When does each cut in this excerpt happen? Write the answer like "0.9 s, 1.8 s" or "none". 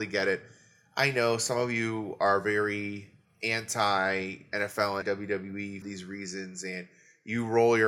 3.2 s, 5.0 s, 5.8 s